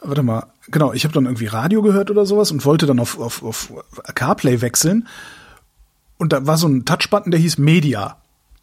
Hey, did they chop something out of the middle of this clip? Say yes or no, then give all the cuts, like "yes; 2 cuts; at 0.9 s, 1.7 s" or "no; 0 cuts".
no; 0 cuts